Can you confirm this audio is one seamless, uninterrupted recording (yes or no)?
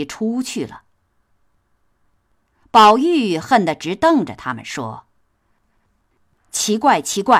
yes